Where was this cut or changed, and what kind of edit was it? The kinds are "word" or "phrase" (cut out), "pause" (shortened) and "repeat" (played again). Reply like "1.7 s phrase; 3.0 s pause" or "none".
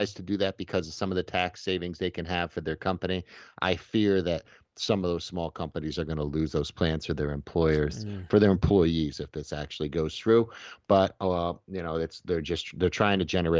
none